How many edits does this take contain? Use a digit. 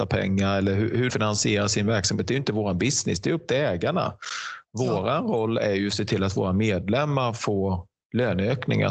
1